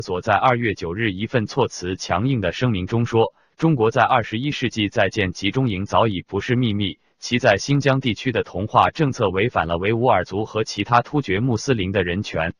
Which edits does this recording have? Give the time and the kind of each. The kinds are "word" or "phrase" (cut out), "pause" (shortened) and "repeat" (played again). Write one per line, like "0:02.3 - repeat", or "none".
none